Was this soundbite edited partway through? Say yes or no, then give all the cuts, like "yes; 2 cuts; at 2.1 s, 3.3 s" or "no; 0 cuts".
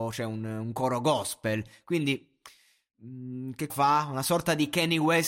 yes; 1 cut; at 3.7 s